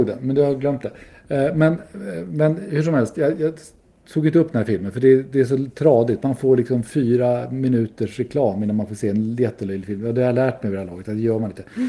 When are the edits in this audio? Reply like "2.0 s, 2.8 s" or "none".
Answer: none

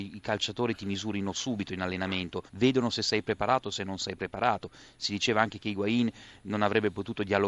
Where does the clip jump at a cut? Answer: 2.5 s

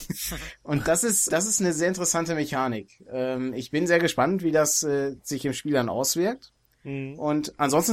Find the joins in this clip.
1.3 s

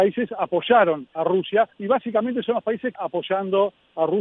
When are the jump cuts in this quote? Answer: 1.7 s, 2.9 s

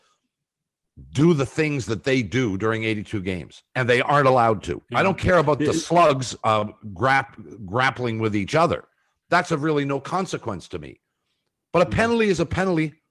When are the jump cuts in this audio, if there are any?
3.7 s, 4.9 s, 6.4 s

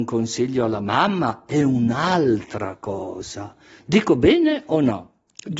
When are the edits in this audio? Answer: none

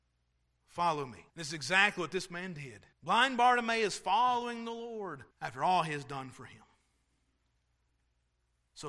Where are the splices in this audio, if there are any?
1.3 s, 2.9 s, 5.3 s

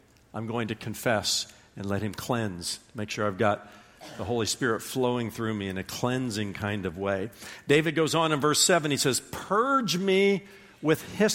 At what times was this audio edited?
none

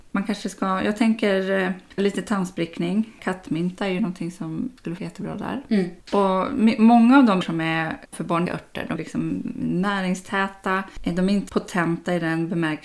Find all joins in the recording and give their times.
2.0 s, 5.0 s, 6.0 s, 7.4 s, 8.1 s, 8.5 s, 9.0 s, 11.5 s

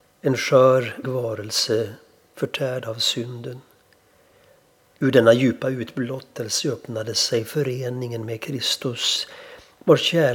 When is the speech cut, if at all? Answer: 1.0 s

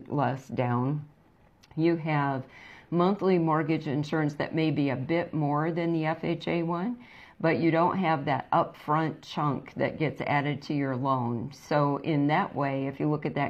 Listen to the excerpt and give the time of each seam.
none

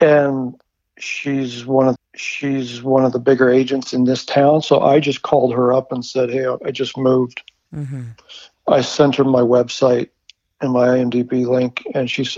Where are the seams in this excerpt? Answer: 2.0 s

